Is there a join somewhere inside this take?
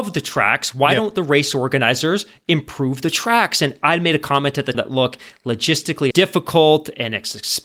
yes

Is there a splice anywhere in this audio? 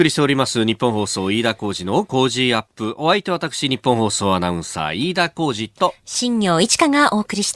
yes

